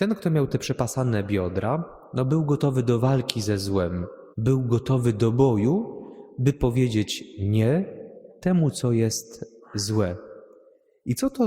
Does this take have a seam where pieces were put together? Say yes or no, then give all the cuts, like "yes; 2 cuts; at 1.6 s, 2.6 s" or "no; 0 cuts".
yes; 1 cut; at 4.3 s